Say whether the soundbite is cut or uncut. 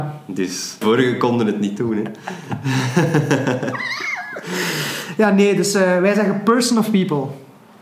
uncut